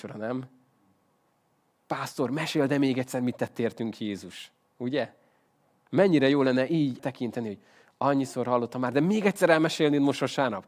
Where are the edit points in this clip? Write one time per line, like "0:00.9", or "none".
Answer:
0:07.0